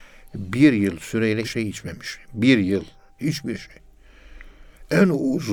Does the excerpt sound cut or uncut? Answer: cut